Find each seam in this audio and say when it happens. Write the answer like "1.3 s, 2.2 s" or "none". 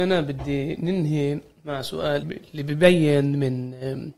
2.2 s